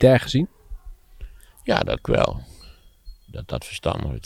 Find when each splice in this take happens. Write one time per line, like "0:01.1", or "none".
0:01.4
0:02.0